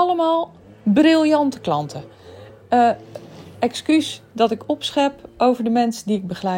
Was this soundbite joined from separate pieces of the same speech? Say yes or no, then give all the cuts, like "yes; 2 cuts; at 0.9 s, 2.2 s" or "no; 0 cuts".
no; 0 cuts